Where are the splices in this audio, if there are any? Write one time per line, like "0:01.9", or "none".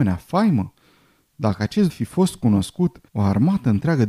0:01.9
0:03.1